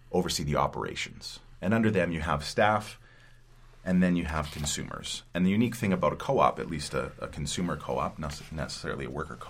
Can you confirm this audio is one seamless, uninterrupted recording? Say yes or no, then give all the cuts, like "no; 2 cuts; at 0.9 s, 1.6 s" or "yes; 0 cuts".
yes; 0 cuts